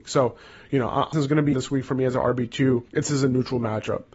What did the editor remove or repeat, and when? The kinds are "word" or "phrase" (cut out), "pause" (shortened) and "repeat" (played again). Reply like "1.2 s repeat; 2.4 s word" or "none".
1.1 s word; 1.5 s word; 2.9 s pause